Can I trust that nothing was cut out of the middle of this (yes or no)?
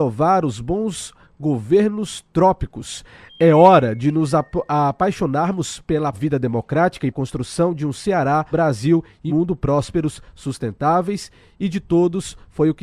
no